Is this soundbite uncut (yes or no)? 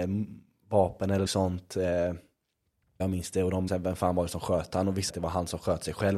no